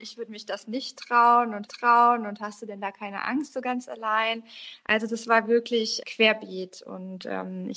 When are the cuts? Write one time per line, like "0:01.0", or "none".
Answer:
0:01.7
0:06.0